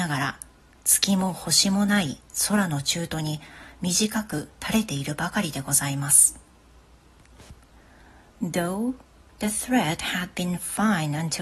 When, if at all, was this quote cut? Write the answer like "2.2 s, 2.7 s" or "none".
none